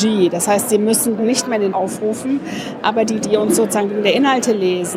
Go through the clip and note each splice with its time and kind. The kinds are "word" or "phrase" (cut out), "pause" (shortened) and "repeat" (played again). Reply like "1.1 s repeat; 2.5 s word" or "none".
1.2 s word; 1.7 s word; 3.2 s word